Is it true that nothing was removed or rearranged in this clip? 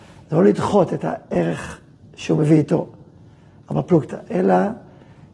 yes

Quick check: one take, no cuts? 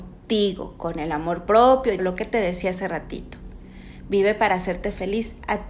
no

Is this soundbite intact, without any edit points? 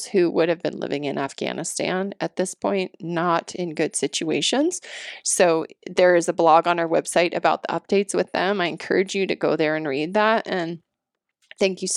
yes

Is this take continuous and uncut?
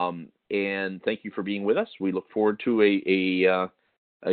yes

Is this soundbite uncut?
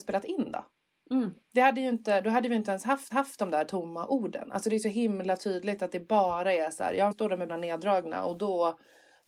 no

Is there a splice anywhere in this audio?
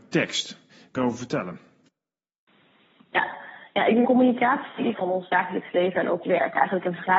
yes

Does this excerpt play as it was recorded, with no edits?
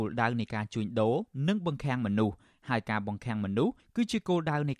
yes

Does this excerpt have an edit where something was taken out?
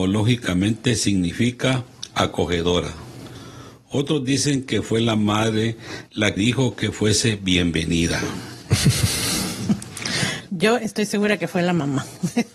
yes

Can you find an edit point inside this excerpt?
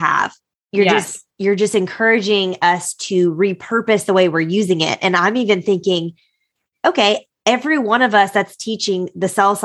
no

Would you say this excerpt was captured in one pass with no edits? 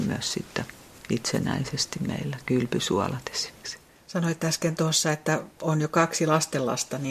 yes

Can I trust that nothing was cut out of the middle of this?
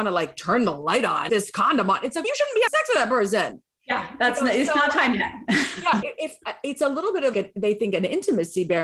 no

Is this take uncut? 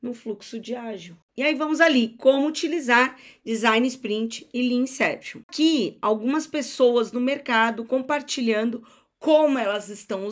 yes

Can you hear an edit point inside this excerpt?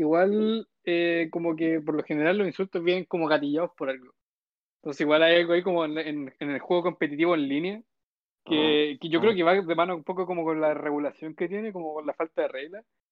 no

